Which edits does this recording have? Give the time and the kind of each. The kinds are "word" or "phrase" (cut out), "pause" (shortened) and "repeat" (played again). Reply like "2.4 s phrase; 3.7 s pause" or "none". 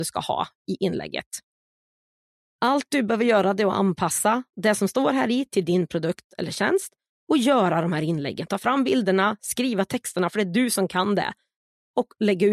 none